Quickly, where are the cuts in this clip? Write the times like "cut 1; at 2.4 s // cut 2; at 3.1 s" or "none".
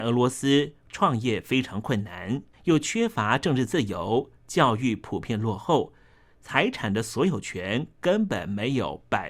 cut 1; at 2.5 s